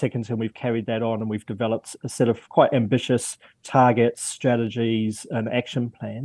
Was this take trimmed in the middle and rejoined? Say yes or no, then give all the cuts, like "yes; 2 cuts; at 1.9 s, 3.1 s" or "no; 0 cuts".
yes; 1 cut; at 2.4 s